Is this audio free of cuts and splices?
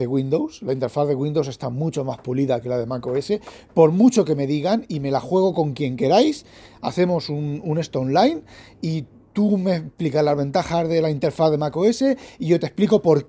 yes; 0 cuts

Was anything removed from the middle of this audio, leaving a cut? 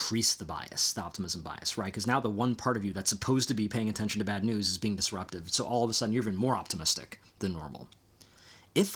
no; 0 cuts

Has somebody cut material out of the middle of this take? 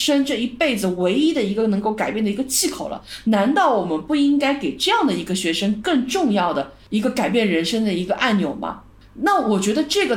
no; 0 cuts

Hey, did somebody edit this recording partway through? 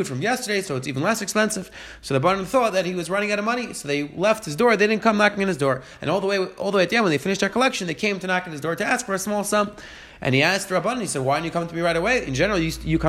no; 0 cuts

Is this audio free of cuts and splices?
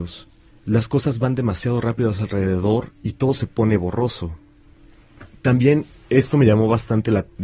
yes; 0 cuts

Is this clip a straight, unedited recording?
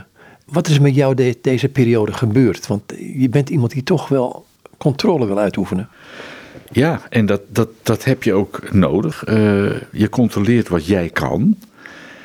yes; 0 cuts

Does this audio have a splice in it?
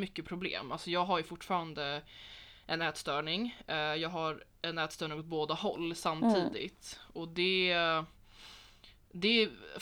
no; 0 cuts

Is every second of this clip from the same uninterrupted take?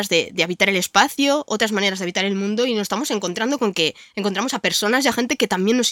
yes; 0 cuts

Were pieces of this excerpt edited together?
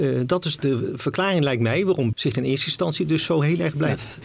yes; 1 cut; at 2.1 s

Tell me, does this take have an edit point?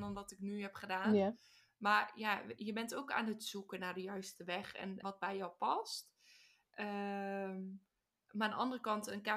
yes; 1 cut; at 5.0 s

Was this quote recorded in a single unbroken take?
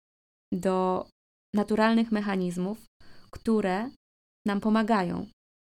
yes; 0 cuts

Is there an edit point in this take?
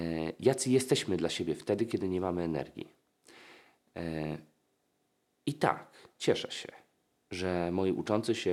no; 0 cuts

